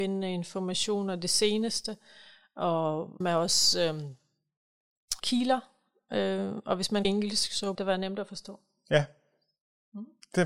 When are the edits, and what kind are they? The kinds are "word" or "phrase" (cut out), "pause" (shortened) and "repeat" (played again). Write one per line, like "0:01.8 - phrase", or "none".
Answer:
0:03.2 - word
0:05.2 - word
0:07.0 - word
0:07.7 - word